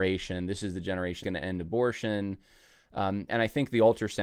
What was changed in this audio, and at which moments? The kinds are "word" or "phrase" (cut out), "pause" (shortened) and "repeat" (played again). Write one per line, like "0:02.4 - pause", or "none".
0:01.2 - word
0:03.3 - word